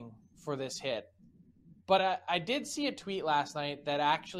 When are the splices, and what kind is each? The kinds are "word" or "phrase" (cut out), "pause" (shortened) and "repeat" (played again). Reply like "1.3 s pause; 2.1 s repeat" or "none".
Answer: none